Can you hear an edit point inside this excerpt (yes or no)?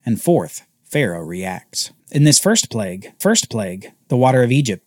yes